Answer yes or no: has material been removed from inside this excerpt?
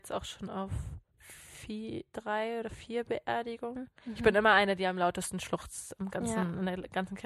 yes